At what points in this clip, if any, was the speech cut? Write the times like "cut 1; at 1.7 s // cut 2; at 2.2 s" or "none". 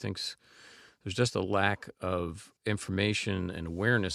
cut 1; at 2.6 s